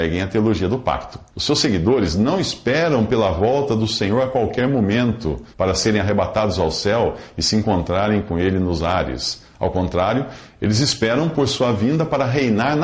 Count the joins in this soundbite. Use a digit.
2